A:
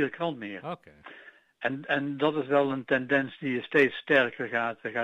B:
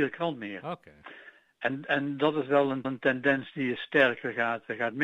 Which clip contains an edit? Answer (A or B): B